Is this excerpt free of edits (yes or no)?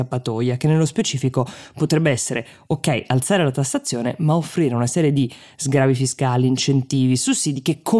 yes